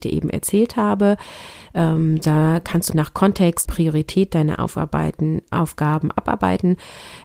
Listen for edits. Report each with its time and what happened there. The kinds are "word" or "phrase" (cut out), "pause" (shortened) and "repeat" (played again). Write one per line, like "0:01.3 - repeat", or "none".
0:02.9 - word
0:03.6 - phrase